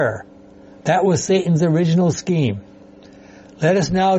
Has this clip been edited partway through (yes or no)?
no